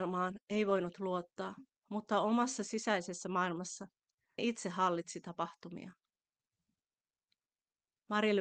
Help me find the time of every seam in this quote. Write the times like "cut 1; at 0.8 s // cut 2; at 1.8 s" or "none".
cut 1; at 4.4 s